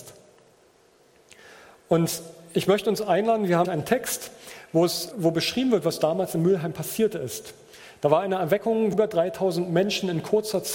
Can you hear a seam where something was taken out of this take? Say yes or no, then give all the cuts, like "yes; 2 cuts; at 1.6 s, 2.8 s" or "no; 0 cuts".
yes; 3 cuts; at 3.6 s, 5.1 s, 8.9 s